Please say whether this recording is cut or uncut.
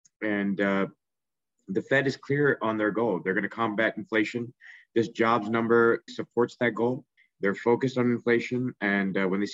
cut